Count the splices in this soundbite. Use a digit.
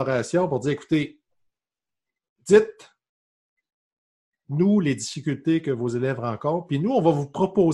0